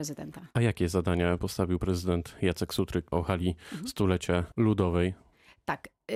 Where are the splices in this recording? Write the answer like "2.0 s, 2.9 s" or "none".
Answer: 1.4 s, 1.8 s, 3.1 s, 4.5 s